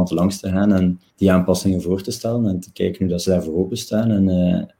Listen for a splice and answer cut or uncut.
cut